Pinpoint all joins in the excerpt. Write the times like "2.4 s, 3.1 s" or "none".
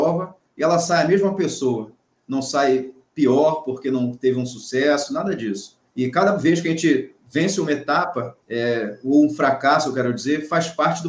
5.9 s, 8.4 s